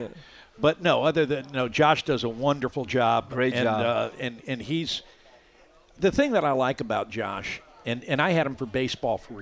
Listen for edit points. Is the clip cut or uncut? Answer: uncut